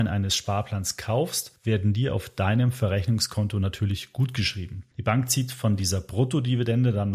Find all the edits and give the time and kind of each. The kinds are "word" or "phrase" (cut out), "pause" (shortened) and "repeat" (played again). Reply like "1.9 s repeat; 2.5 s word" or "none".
none